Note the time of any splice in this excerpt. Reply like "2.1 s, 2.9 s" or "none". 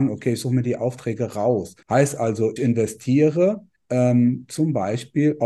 1.8 s, 2.6 s, 3.8 s